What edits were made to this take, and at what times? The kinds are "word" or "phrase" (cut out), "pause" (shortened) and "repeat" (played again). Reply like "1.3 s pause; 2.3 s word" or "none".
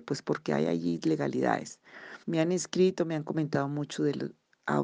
2.2 s pause